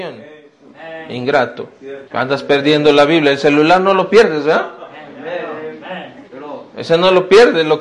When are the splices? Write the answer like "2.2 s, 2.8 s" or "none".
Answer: 2.1 s